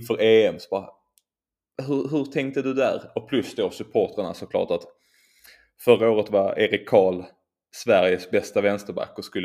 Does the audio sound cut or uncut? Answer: uncut